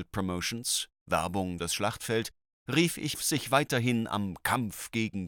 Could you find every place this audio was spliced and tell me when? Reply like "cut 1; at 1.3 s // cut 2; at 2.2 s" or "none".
cut 1; at 1.6 s // cut 2; at 3.1 s